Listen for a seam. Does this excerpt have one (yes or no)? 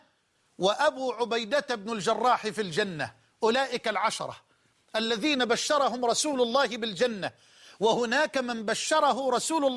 no